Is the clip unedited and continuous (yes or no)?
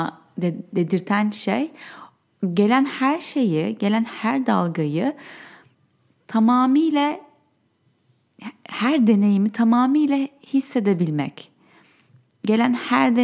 yes